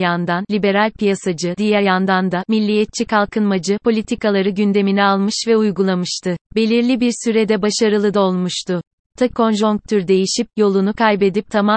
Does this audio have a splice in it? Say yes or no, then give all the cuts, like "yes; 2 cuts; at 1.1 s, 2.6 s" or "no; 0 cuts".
yes; 3 cuts; at 1.6 s, 6.4 s, 9.3 s